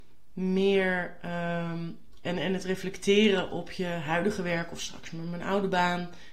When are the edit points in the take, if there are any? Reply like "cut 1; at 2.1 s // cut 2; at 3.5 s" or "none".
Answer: none